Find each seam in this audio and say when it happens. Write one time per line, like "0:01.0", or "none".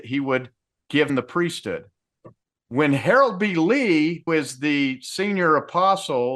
0:01.1
0:02.4
0:04.3